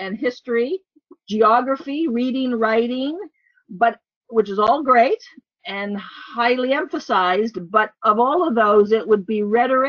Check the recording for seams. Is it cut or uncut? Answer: uncut